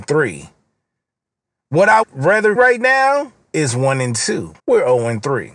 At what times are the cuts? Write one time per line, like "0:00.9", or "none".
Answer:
0:02.0
0:02.6
0:04.6

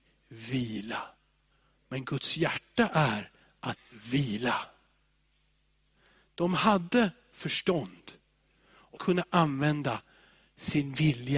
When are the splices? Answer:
0:01.5
0:03.8
0:09.0

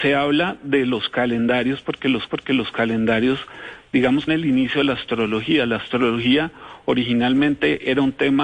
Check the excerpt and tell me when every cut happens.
0:02.3
0:04.3

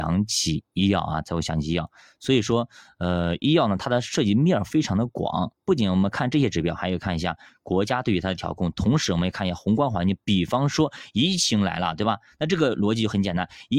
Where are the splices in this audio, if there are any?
none

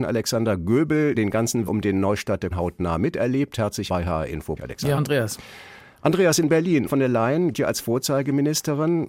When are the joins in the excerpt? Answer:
0:01.1
0:01.7
0:02.5
0:03.9
0:04.6
0:05.0
0:06.9
0:07.5

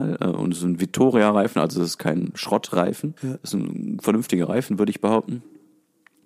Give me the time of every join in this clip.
0:03.2

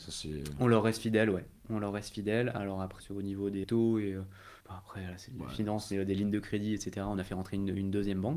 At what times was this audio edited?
0:03.0
0:03.6
0:04.6

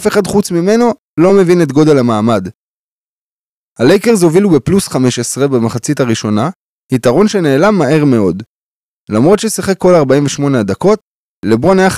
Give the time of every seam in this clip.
none

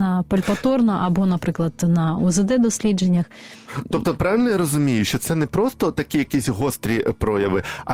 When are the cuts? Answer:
none

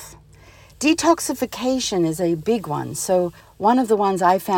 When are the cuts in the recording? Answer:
0:03.4

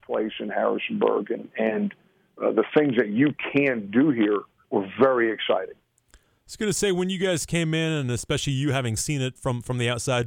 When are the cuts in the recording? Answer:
0:04.6
0:09.4

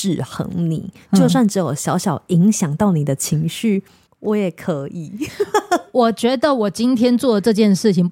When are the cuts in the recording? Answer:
0:04.1

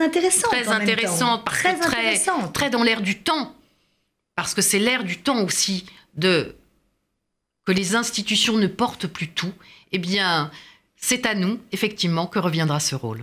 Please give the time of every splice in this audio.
none

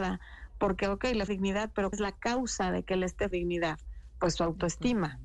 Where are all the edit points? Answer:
0:01.3
0:01.9
0:03.3

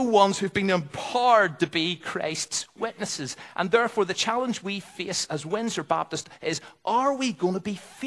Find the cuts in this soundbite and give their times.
none

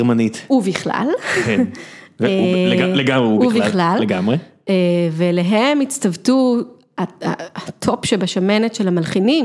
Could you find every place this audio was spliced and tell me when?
none

